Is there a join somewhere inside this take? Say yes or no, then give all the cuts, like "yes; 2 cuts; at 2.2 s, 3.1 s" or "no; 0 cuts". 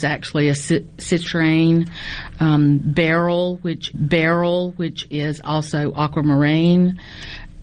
yes; 1 cut; at 3.9 s